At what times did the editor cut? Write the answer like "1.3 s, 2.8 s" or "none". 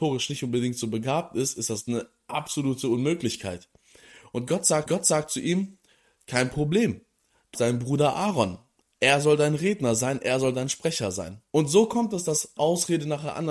4.9 s, 7.5 s, 11.5 s, 12.6 s